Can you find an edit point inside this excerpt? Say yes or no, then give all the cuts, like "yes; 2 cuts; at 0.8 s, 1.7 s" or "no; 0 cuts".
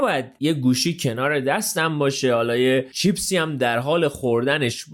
no; 0 cuts